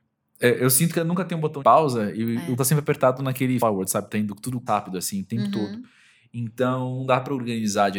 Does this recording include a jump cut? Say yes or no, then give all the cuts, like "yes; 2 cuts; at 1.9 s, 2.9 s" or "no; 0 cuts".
yes; 5 cuts; at 1.0 s, 1.6 s, 2.6 s, 3.6 s, 4.7 s